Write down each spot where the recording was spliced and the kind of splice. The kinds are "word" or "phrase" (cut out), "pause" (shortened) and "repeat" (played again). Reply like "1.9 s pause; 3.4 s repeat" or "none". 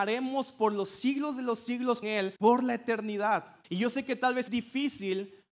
2.0 s word; 2.4 s pause; 3.6 s pause; 4.5 s word